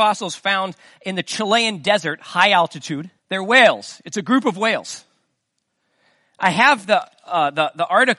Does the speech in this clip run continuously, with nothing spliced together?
no; 1 cut; at 3.2 s

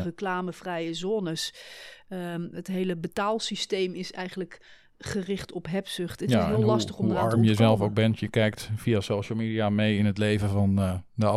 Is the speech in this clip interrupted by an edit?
no; 0 cuts

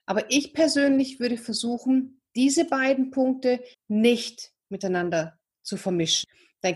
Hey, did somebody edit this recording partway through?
yes; 1 cut; at 3.7 s

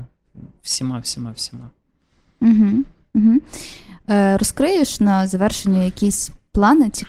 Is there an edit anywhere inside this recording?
no; 0 cuts

